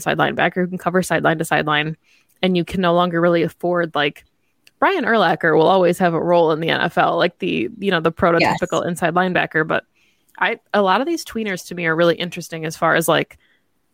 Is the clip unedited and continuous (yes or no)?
yes